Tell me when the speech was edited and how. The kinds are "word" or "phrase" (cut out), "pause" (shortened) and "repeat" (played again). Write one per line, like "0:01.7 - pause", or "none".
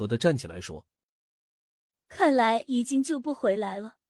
none